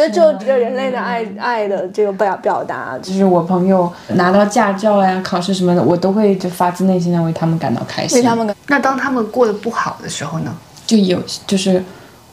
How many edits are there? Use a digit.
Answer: 0